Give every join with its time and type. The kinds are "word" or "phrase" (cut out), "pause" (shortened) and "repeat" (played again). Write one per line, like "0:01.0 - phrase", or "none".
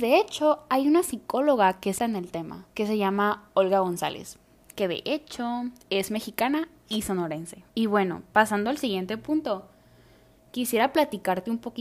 0:02.0 - word
0:02.7 - pause
0:07.7 - pause

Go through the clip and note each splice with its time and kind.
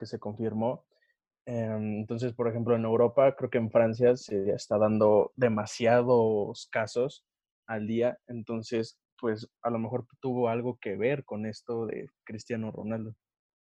none

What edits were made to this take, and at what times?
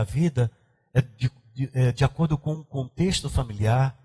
none

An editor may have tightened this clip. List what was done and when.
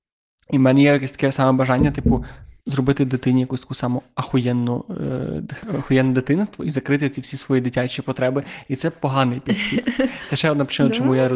0:02.6 - pause

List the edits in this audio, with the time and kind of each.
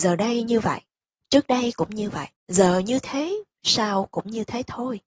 0:02.4 - pause

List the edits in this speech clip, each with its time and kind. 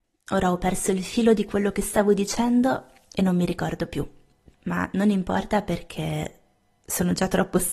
none

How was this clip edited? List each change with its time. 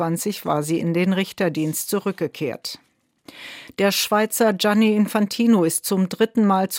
none

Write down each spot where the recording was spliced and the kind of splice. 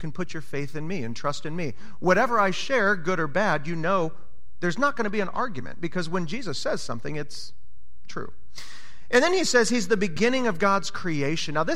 none

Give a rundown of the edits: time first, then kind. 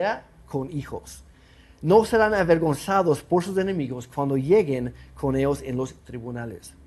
none

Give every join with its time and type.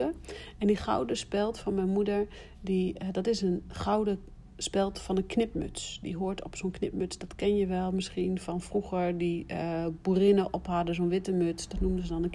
none

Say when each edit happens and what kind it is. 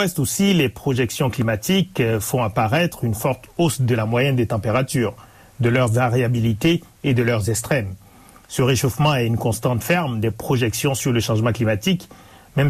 none

